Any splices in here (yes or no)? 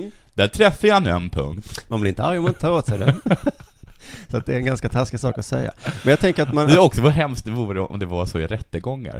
no